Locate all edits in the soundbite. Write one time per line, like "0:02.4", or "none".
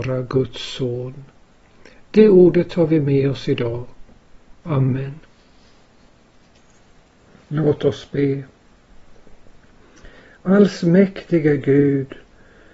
none